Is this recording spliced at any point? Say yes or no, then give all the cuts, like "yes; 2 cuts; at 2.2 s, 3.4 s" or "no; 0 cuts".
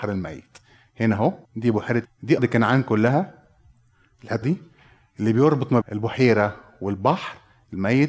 yes; 5 cuts; at 1.4 s, 2.0 s, 2.4 s, 4.4 s, 5.8 s